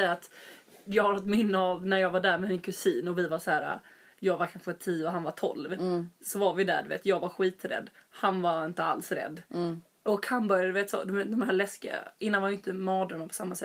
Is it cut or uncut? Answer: uncut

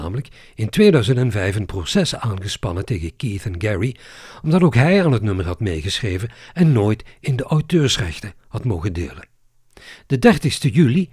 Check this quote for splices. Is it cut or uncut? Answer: uncut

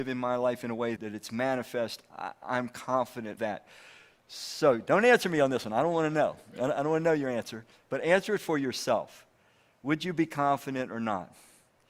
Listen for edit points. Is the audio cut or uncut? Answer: cut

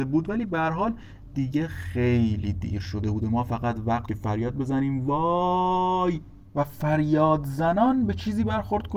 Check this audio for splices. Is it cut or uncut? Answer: cut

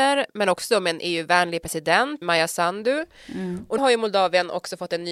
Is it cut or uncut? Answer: cut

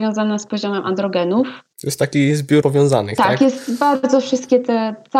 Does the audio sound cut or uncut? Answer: cut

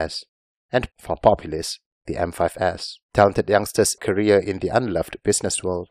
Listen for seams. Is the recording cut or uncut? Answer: cut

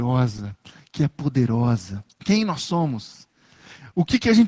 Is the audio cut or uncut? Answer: cut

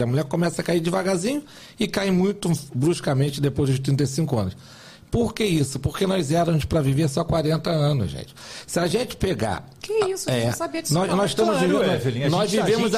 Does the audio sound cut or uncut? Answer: uncut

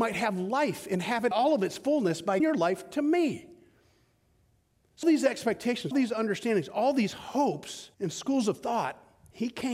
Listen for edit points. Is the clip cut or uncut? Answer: cut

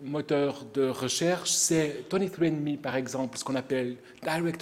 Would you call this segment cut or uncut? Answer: uncut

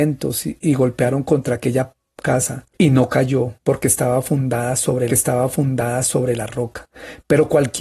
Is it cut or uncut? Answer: cut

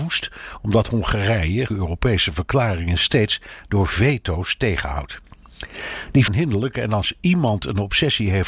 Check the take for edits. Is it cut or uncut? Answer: cut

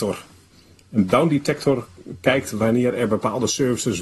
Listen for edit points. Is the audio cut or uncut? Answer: uncut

